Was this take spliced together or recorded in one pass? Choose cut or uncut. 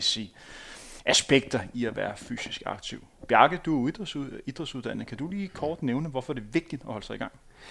cut